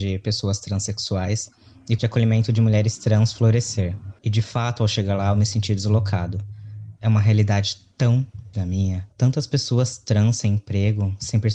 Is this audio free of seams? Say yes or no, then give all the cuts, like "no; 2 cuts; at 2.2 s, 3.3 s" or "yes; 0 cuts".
no; 5 cuts; at 2.0 s, 4.2 s, 7.0 s, 8.5 s, 9.1 s